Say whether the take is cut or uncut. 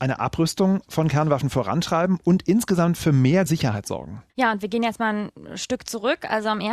cut